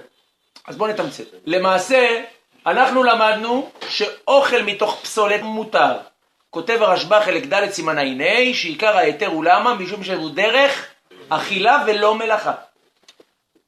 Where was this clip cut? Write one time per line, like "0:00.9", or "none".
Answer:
0:01.3
0:05.4
0:11.1